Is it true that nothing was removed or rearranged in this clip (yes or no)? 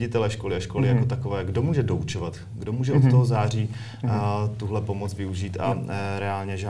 yes